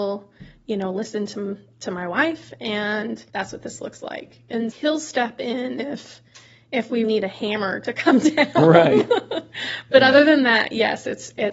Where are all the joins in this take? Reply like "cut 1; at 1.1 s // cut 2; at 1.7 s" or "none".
cut 1; at 3.3 s // cut 2; at 4.7 s // cut 3; at 7.0 s